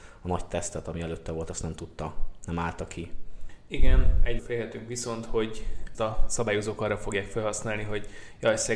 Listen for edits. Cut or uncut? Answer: cut